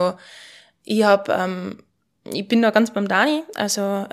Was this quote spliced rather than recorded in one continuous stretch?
no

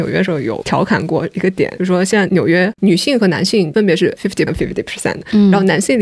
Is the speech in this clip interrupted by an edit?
yes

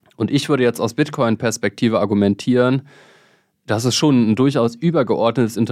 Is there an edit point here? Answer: no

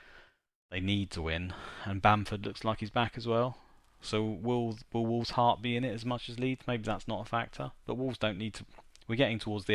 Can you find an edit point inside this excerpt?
no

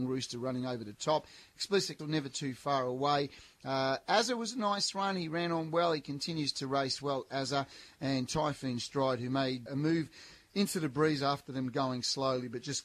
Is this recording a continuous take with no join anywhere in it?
no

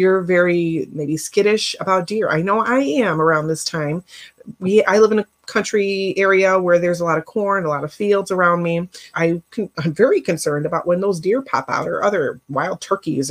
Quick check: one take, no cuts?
no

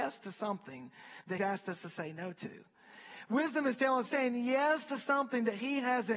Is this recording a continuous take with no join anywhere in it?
no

